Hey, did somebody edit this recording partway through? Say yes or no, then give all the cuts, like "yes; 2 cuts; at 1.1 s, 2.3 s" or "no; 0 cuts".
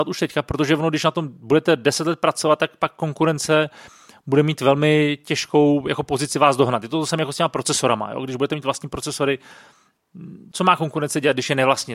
no; 0 cuts